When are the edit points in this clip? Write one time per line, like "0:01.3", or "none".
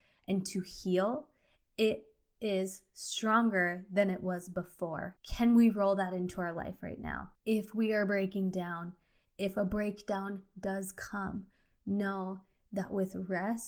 none